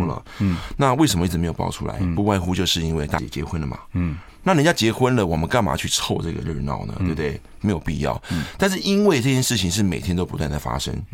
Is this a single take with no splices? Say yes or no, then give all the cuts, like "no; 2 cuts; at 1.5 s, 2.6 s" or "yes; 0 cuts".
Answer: no; 1 cut; at 3.2 s